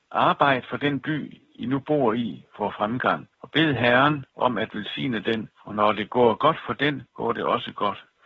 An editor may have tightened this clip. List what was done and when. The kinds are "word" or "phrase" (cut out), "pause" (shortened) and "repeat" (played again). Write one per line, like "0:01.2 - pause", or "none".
0:03.3 - pause
0:04.3 - pause
0:05.5 - pause
0:07.1 - pause